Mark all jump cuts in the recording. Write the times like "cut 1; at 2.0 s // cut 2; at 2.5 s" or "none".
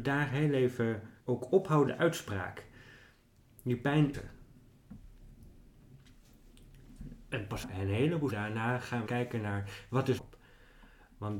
cut 1; at 1.2 s // cut 2; at 1.9 s // cut 3; at 4.1 s // cut 4; at 7.6 s // cut 5; at 8.3 s // cut 6; at 9.1 s // cut 7; at 10.2 s